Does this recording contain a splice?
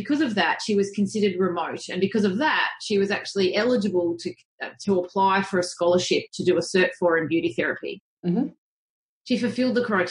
no; 0 cuts

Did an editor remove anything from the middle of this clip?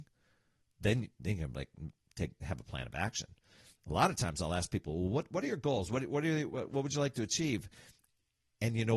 no; 0 cuts

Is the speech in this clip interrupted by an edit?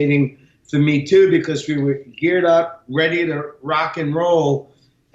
no; 0 cuts

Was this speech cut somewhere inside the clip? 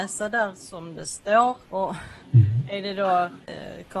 yes; 1 cut; at 1.6 s

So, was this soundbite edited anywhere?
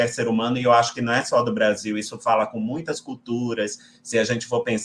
no; 0 cuts

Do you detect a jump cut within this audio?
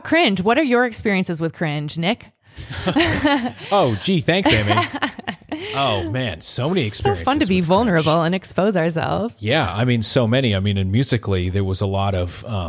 no; 0 cuts

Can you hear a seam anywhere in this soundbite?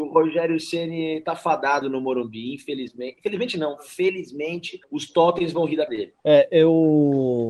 yes; 4 cuts; at 1.8 s, 4.8 s, 5.9 s, 6.2 s

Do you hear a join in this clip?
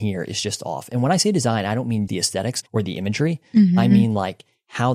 yes; 2 cuts; at 2.1 s, 2.7 s

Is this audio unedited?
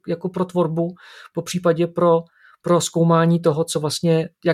yes; 0 cuts

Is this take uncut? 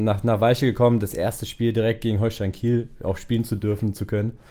yes; 0 cuts

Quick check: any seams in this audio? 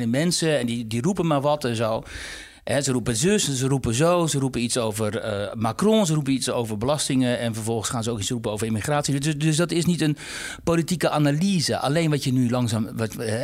no; 0 cuts

